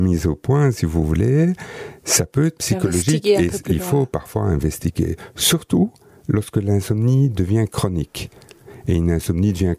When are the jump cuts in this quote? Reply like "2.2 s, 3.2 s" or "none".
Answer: none